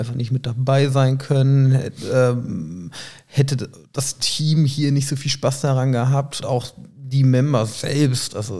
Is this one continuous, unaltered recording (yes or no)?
no